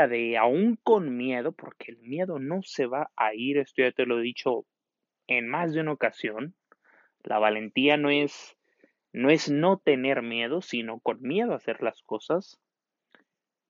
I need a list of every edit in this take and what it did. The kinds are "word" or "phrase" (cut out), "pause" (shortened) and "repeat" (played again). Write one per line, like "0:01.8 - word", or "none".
none